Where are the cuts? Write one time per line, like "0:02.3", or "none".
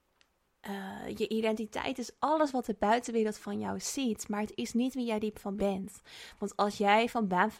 0:05.6